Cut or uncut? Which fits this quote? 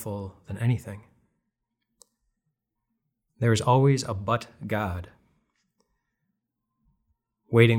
uncut